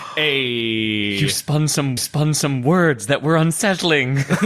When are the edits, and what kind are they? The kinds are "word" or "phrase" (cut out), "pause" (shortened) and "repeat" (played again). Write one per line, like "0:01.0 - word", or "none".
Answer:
0:02.0 - repeat